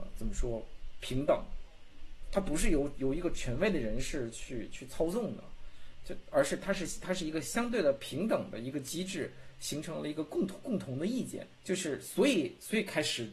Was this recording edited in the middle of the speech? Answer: yes; 1 cut; at 11.5 s

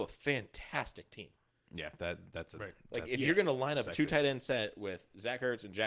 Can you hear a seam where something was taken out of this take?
no; 0 cuts

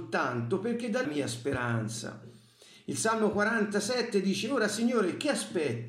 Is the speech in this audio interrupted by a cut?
yes; 1 cut; at 1.0 s

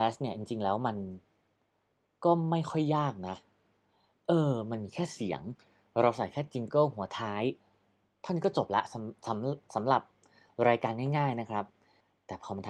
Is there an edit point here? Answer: no; 0 cuts

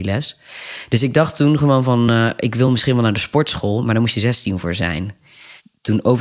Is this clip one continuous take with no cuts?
yes; 0 cuts

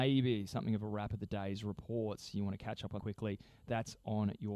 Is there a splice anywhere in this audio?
yes; 1 cut; at 3.0 s

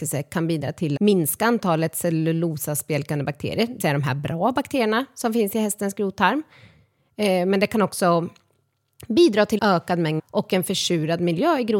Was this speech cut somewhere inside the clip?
yes; 4 cuts; at 1.0 s, 3.8 s, 9.6 s, 10.2 s

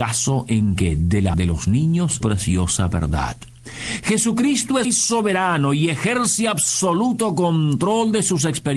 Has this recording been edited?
yes; 3 cuts; at 1.3 s, 2.2 s, 4.8 s

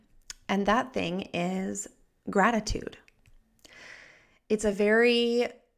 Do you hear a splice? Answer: no; 0 cuts

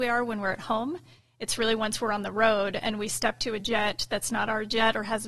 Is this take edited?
no; 0 cuts

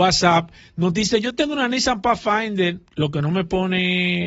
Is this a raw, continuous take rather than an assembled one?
no; 1 cut; at 2.9 s

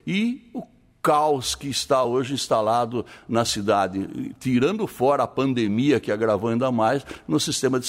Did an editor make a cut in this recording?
no; 0 cuts

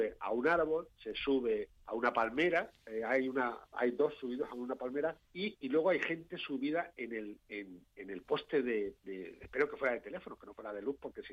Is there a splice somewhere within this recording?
yes; 2 cuts; at 1.8 s, 5.2 s

